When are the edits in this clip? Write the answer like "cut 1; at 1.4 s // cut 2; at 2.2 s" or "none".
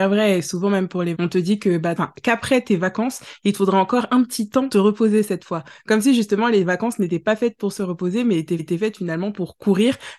cut 1; at 1.1 s // cut 2; at 2.0 s // cut 3; at 4.7 s // cut 4; at 8.6 s